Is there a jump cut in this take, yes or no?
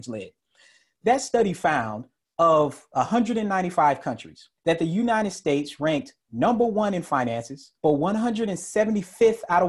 yes